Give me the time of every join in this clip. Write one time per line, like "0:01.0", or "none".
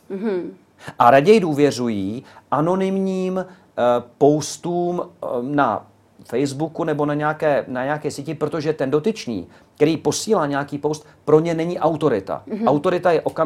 none